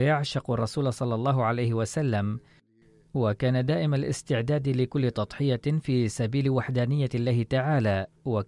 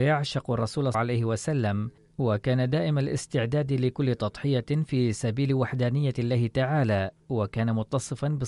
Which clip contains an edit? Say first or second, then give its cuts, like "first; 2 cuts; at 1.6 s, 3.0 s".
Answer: second; 2 cuts; at 0.9 s, 2.0 s